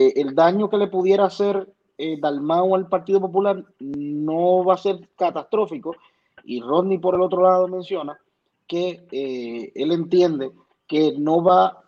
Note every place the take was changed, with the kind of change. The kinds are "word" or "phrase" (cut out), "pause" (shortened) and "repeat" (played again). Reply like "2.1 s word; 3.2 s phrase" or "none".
none